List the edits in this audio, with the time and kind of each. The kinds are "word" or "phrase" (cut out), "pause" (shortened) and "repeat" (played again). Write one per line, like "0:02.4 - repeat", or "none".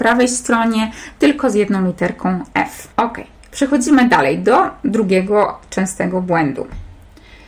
0:02.9 - pause